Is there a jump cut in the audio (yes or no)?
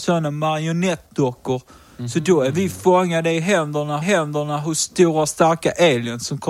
yes